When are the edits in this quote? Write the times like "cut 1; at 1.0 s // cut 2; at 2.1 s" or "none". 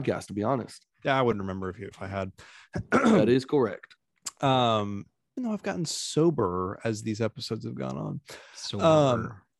cut 1; at 1.9 s // cut 2; at 5.4 s